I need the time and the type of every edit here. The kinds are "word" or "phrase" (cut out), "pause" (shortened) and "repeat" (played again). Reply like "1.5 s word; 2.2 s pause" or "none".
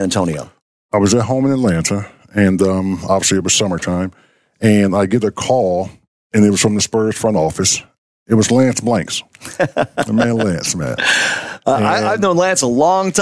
none